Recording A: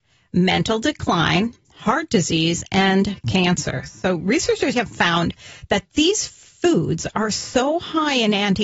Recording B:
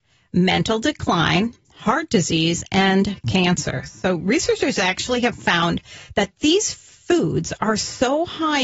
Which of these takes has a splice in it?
A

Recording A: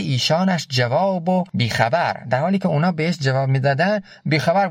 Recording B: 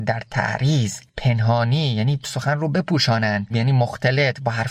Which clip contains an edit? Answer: B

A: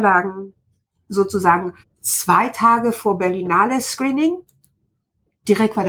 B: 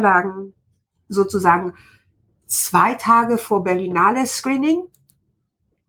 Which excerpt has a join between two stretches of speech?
A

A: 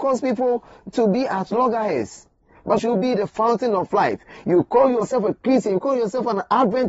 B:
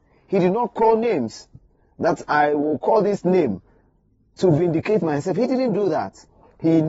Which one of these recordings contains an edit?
A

